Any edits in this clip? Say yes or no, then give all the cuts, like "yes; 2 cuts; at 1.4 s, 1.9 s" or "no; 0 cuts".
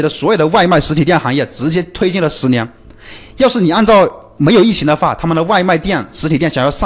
no; 0 cuts